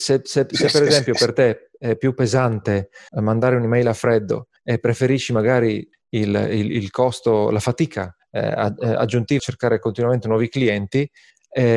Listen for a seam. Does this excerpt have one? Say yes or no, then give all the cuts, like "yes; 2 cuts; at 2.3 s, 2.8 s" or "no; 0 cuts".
yes; 5 cuts; at 3.1 s, 4.6 s, 5.9 s, 8.2 s, 9.4 s